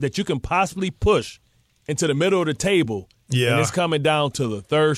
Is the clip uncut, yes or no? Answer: yes